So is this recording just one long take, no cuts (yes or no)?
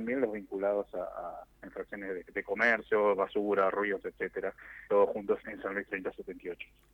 no